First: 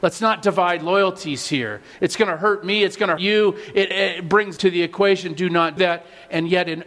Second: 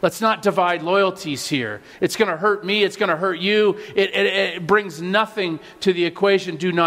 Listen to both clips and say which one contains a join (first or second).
first